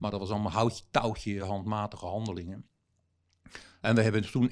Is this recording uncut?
yes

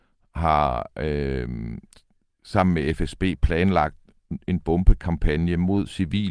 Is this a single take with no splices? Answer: yes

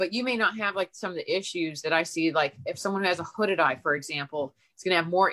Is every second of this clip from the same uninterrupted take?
yes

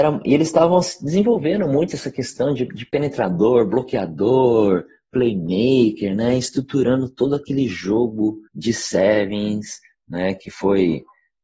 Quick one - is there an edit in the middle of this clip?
yes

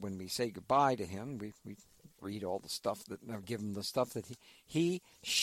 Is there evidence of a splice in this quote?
no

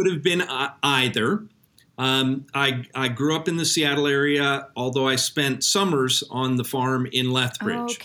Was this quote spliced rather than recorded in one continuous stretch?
no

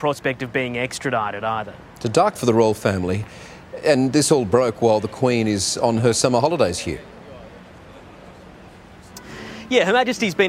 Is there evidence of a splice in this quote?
yes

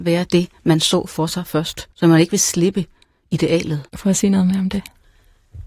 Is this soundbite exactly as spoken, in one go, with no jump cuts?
no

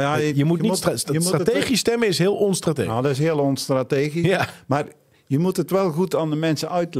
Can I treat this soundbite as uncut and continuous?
yes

